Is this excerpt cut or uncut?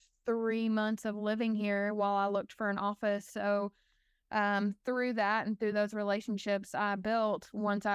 uncut